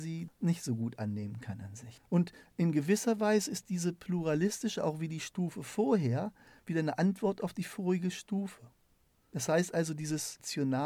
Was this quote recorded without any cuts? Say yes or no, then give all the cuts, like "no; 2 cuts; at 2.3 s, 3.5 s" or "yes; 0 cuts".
yes; 0 cuts